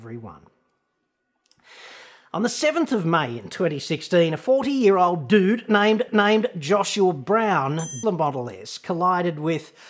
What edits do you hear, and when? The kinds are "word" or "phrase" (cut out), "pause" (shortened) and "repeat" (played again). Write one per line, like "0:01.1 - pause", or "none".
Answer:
0:06.1 - repeat
0:08.0 - phrase